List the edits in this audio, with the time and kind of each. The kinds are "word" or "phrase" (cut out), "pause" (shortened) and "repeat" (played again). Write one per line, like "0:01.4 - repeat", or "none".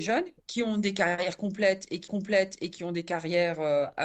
0:02.1 - repeat

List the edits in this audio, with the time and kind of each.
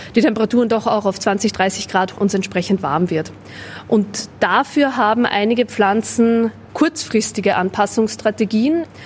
0:02.2 - word
0:06.7 - word

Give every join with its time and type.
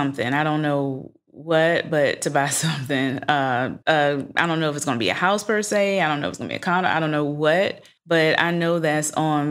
0:03.8 - pause
0:08.0 - pause

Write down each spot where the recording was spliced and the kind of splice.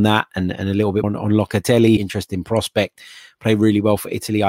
0:01.0 - word
0:02.0 - phrase

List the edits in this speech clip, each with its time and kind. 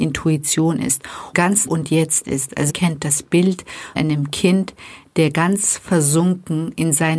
0:01.3 - word
0:01.7 - phrase
0:02.7 - word
0:04.0 - word

